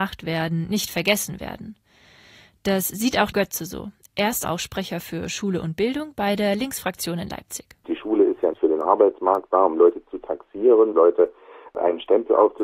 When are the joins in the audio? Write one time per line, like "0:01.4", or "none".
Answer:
0:03.3
0:04.4
0:08.5
0:10.9

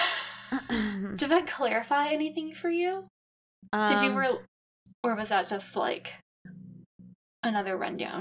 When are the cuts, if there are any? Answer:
none

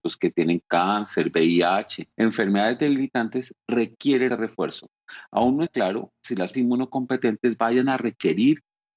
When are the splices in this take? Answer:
0:02.1
0:04.3
0:05.7
0:06.5

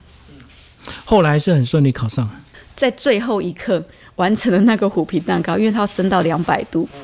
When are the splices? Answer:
none

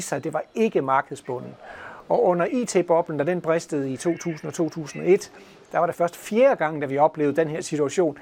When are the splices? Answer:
0:05.9

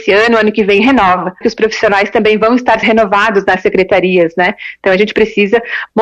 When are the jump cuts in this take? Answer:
0:01.4
0:02.8

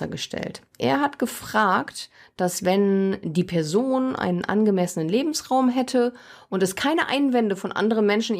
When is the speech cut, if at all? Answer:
none

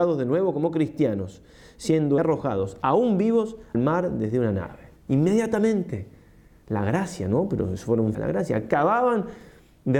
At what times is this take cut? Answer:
0:02.2
0:03.7
0:05.0
0:08.1

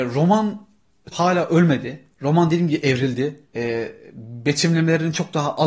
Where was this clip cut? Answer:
0:01.1
0:02.1
0:03.5

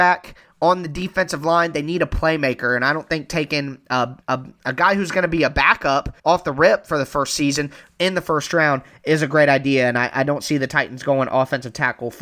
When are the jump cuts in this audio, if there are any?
0:04.2
0:06.2

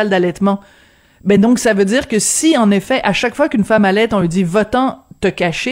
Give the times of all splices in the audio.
none

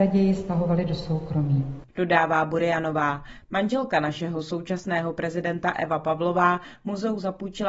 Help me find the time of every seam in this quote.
none

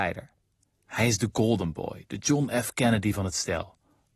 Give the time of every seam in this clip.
none

